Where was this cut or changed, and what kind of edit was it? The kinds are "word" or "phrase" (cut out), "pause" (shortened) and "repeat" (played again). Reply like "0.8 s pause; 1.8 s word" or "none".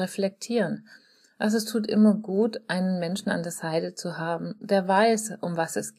none